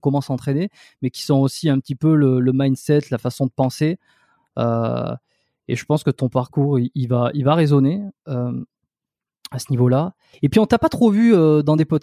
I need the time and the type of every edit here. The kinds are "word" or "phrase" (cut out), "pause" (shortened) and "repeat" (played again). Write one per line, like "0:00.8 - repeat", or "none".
0:10.3 - pause